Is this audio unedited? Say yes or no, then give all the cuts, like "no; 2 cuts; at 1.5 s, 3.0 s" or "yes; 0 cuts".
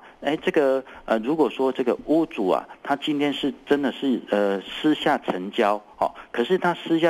yes; 0 cuts